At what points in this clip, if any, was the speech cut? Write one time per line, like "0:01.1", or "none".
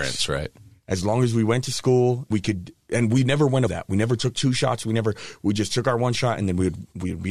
0:02.3
0:03.7